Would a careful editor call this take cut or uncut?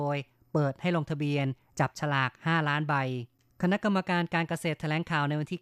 uncut